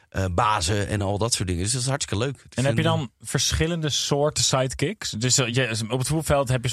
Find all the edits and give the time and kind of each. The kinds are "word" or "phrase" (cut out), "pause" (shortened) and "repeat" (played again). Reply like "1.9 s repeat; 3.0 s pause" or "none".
none